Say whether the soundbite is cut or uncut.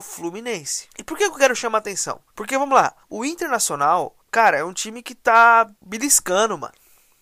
cut